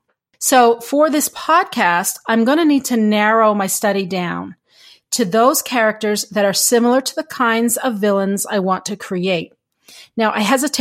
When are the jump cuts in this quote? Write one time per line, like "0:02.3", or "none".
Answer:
none